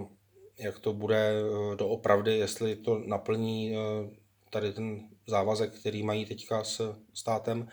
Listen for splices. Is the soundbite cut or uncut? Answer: uncut